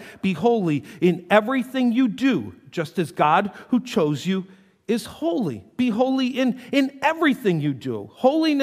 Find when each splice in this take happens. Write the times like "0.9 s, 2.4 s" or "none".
none